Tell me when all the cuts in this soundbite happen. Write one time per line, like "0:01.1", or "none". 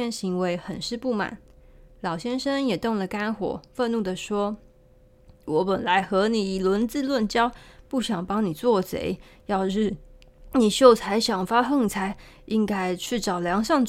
none